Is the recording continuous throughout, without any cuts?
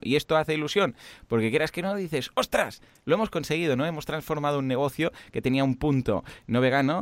yes; 0 cuts

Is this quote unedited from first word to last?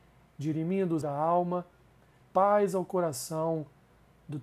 no; 2 cuts; at 1.0 s, 2.2 s

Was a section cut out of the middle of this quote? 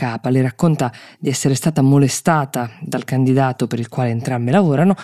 no; 0 cuts

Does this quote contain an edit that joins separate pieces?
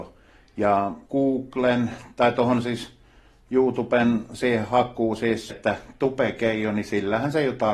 yes; 2 cuts; at 1.1 s, 5.5 s

